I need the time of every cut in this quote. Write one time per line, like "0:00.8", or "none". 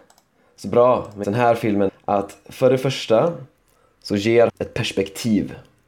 0:01.2
0:01.9
0:04.5